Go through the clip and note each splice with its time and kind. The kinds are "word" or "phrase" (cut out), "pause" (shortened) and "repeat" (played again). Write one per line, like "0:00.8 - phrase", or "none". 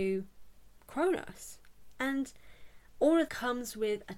0:03.3 - word